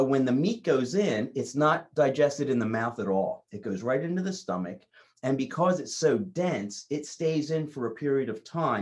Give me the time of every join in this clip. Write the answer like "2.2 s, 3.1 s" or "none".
none